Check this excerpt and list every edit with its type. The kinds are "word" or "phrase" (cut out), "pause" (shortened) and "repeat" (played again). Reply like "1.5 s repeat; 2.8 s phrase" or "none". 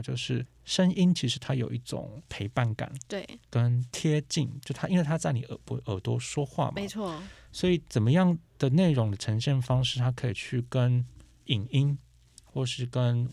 none